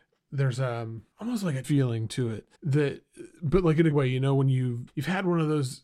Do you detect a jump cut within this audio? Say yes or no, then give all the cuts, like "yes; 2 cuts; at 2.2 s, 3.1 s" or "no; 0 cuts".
yes; 5 cuts; at 1.1 s, 1.6 s, 2.5 s, 3.9 s, 4.9 s